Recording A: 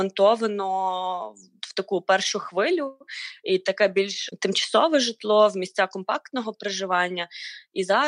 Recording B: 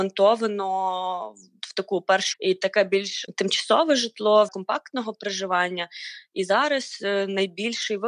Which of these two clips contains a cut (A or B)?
B